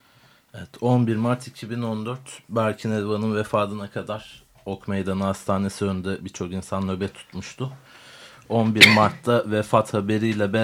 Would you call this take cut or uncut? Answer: uncut